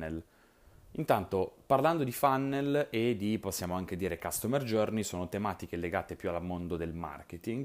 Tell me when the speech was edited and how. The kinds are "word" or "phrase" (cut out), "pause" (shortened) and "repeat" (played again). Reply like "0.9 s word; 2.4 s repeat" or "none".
none

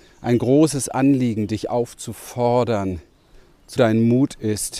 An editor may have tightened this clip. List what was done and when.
3.8 s phrase

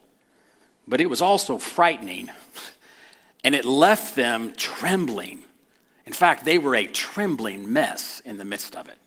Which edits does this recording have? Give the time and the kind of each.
none

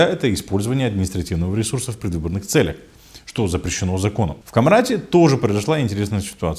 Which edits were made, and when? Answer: 4.4 s pause

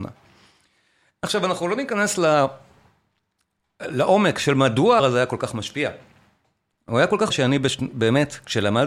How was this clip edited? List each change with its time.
5.0 s word; 7.3 s word

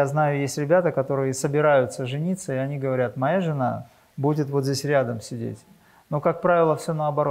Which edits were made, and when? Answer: none

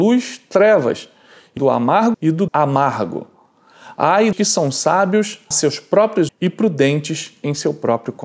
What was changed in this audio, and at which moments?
1.6 s word; 2.1 s word; 2.5 s word; 4.3 s word; 5.5 s word; 6.3 s word

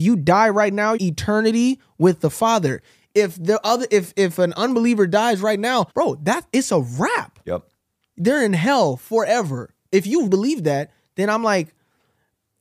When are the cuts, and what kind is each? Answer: 1.0 s phrase; 5.9 s pause; 10.3 s word

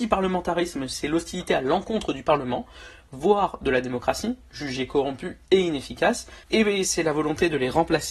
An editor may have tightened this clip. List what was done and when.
6.4 s pause

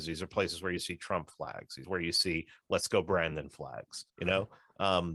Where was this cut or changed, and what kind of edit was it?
1.8 s phrase; 4.1 s pause

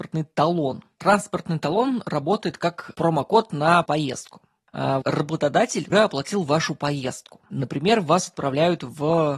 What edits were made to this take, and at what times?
2.9 s word; 3.8 s word; 5.0 s word; 5.9 s word

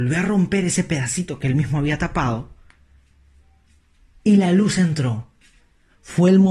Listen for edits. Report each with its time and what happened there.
none

